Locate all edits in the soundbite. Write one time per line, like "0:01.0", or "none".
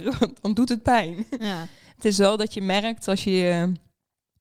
none